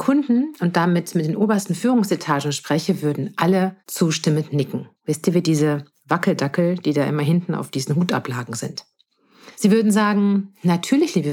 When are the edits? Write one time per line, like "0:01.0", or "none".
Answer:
0:03.8
0:05.0
0:09.5